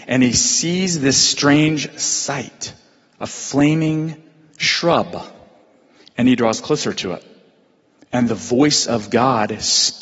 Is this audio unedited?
yes; 0 cuts

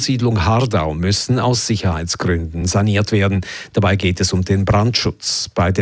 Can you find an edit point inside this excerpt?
no; 0 cuts

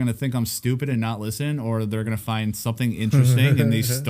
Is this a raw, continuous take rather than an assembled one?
yes; 0 cuts

